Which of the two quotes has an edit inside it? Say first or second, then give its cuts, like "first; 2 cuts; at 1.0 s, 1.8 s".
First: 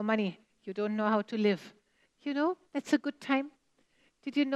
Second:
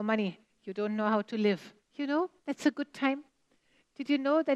second; 1 cut; at 1.8 s